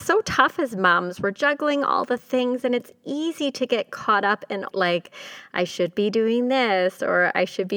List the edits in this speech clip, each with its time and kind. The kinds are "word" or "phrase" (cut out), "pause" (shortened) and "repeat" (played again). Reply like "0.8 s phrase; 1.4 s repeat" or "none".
4.7 s phrase